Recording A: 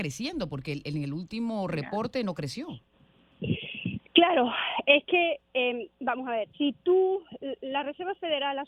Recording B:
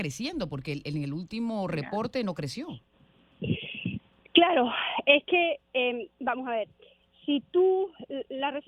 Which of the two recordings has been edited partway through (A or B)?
A